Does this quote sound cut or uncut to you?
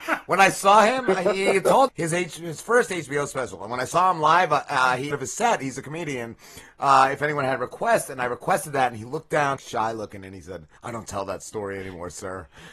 cut